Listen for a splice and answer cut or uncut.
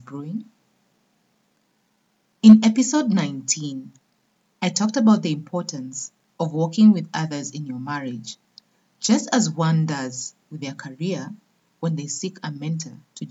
uncut